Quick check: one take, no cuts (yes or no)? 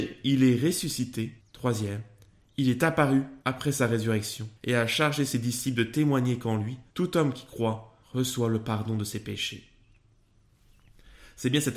no